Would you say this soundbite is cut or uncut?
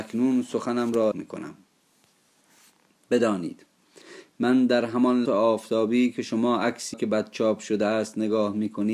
cut